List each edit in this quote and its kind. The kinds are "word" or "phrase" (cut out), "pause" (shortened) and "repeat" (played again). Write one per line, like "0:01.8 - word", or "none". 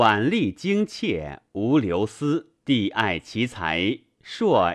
0:02.6 - pause